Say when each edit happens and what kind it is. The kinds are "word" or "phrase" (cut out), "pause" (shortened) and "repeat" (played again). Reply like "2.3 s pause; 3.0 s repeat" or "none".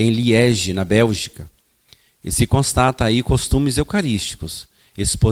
none